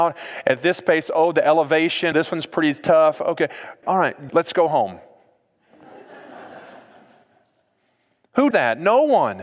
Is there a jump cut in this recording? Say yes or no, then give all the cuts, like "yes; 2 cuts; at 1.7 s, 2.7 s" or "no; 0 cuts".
yes; 4 cuts; at 2.1 s, 3.8 s, 4.3 s, 8.5 s